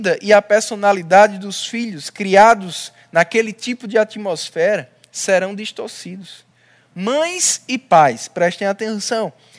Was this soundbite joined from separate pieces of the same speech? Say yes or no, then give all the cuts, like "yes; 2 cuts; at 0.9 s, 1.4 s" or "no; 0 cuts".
no; 0 cuts